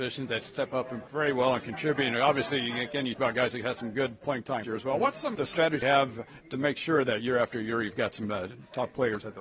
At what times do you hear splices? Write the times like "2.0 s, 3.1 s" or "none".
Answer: 1.1 s, 3.1 s, 4.6 s, 5.3 s, 5.8 s